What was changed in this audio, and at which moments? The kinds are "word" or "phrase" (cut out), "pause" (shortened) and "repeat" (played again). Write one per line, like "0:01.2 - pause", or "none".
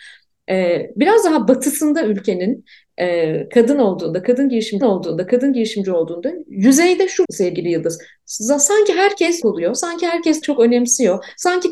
0:04.8 - repeat
0:07.2 - word
0:09.4 - phrase
0:10.4 - word